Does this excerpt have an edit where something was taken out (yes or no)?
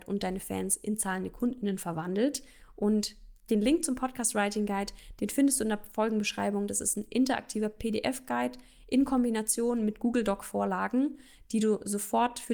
no